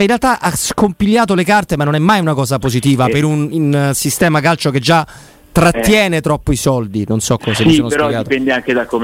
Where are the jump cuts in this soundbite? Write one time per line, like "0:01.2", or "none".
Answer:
none

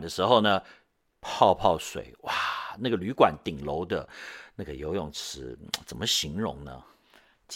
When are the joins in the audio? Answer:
none

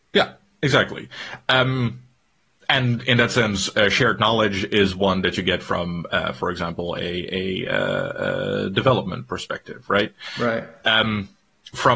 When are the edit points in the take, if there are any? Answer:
none

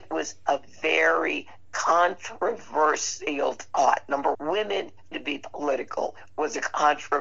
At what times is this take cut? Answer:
0:04.3
0:05.1

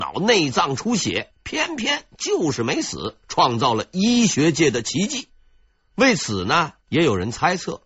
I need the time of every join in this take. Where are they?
0:03.2
0:05.7
0:06.8

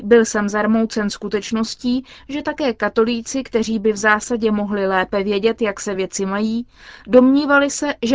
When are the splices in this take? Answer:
none

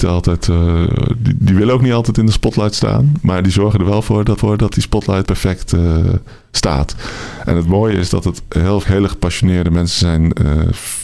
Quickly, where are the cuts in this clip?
0:04.4
0:05.2
0:08.8

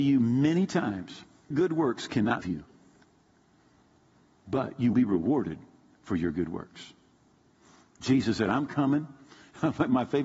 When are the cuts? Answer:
0:01.5
0:02.4
0:04.9

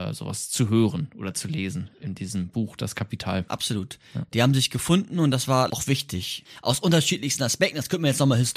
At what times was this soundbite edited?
0:05.7

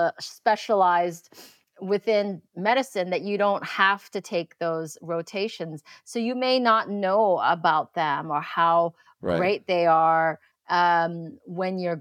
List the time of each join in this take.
none

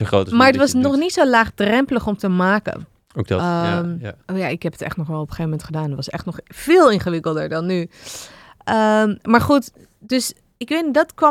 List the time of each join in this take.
0:04.2

